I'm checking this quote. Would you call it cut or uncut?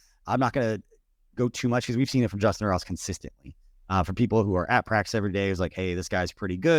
uncut